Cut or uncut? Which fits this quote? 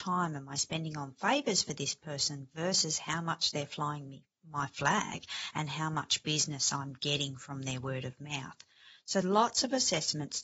cut